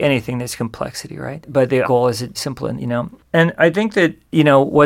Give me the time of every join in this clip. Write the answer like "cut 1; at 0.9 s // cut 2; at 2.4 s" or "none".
cut 1; at 1.8 s // cut 2; at 2.3 s // cut 3; at 2.8 s